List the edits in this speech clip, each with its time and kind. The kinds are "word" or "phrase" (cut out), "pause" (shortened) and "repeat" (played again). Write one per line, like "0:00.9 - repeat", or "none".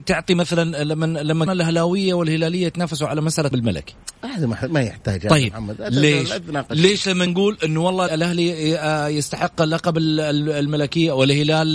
0:01.5 - word
0:03.5 - word
0:07.3 - word
0:08.1 - word